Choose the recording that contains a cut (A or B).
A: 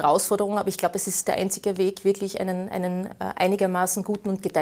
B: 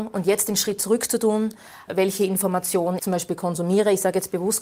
B